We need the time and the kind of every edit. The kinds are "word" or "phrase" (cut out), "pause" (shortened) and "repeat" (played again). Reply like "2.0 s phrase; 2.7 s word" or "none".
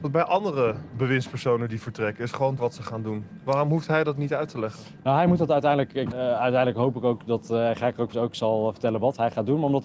2.6 s word; 6.1 s word; 8.1 s phrase